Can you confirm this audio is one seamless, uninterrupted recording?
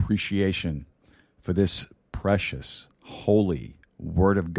yes; 0 cuts

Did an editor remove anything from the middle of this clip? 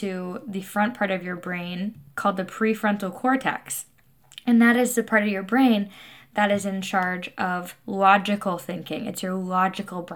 no; 0 cuts

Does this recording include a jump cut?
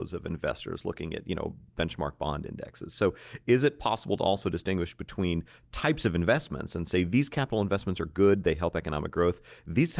no; 0 cuts

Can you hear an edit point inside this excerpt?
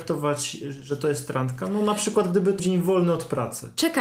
yes; 1 cut; at 2.6 s

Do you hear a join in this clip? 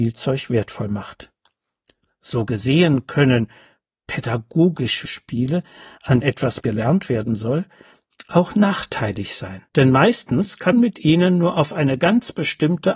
yes; 5 cuts; at 5.1 s, 6.2 s, 6.6 s, 9.7 s, 10.7 s

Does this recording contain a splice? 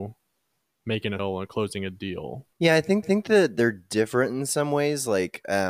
yes; 3 cuts; at 1.2 s, 2.5 s, 3.0 s

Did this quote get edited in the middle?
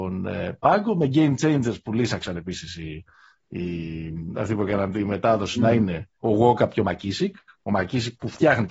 no; 0 cuts

